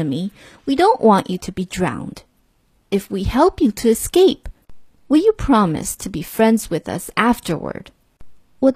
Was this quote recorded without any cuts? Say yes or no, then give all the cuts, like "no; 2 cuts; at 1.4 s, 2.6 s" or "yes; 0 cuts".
yes; 0 cuts